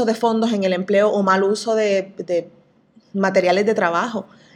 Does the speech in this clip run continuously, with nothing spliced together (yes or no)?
yes